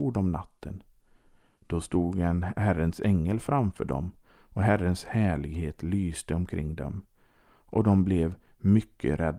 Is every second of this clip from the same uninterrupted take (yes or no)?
yes